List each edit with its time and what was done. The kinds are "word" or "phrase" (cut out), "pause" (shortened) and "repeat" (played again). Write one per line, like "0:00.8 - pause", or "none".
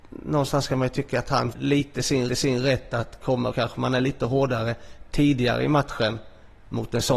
0:01.5 - word
0:02.3 - repeat
0:03.5 - phrase